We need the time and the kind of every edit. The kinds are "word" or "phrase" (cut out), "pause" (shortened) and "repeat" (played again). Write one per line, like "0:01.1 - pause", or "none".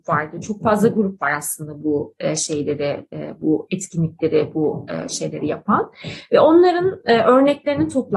none